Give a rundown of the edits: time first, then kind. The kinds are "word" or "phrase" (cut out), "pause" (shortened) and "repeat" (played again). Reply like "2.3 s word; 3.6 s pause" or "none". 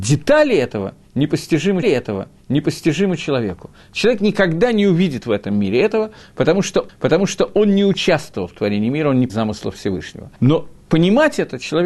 1.8 s repeat; 6.9 s repeat; 9.3 s word; 10.4 s pause